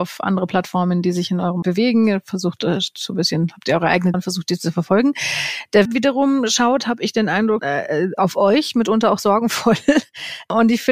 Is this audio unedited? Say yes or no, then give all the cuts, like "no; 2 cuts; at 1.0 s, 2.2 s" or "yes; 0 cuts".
no; 4 cuts; at 1.6 s, 4.1 s, 5.8 s, 7.6 s